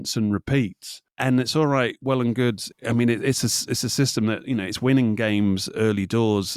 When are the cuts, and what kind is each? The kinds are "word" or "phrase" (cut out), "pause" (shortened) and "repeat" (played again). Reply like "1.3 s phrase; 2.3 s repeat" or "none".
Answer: none